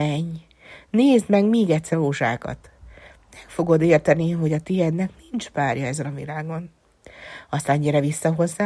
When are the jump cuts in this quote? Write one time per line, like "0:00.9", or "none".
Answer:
0:01.9

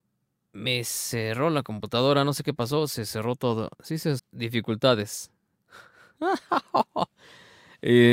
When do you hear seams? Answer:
0:03.7
0:04.2

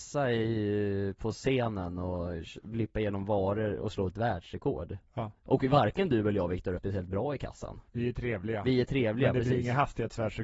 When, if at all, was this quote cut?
0:05.4
0:06.8
0:07.9

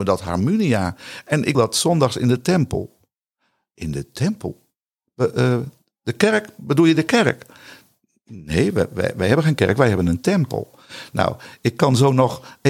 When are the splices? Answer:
0:01.5

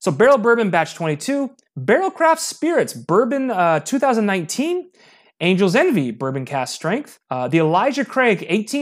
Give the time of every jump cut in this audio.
0:07.2

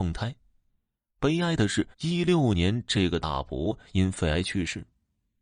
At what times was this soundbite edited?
0:01.9

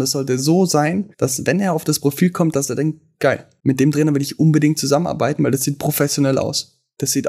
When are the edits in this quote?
0:01.1

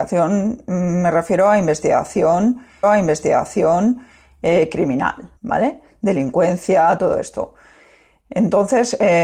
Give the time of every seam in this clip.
0:02.8
0:05.4
0:07.0

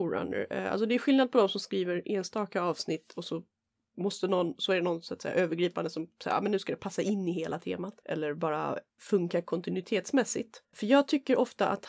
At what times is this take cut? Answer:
none

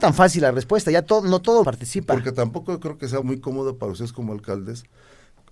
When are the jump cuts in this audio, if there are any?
0:01.6
0:03.2

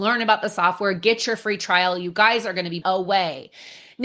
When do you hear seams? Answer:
0:02.8

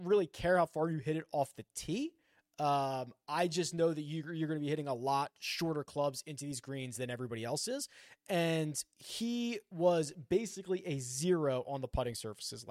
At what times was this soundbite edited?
none

